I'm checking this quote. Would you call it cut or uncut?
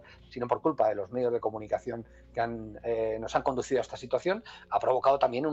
uncut